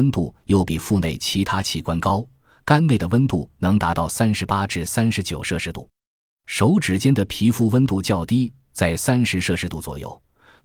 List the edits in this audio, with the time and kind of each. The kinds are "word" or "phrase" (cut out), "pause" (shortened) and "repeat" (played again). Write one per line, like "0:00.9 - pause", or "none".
none